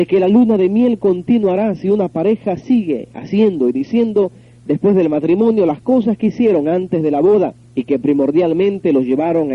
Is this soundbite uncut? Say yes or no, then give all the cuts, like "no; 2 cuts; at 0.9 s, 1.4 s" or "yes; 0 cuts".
yes; 0 cuts